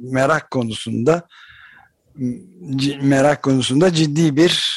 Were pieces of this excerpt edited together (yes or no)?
no